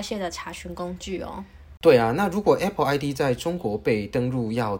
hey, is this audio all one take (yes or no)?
yes